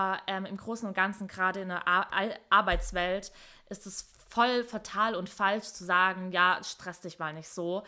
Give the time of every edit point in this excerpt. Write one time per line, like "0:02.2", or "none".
none